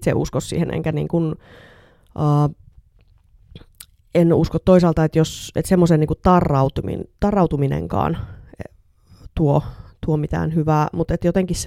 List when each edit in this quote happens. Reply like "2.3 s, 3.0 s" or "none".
none